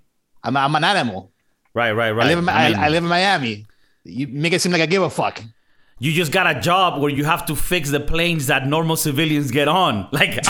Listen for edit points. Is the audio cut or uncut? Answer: uncut